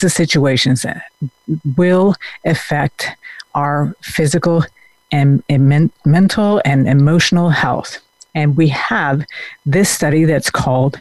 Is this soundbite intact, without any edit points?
yes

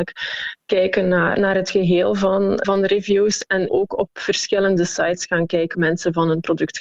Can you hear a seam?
yes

